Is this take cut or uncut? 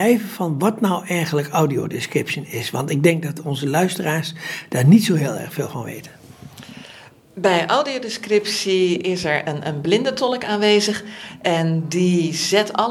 uncut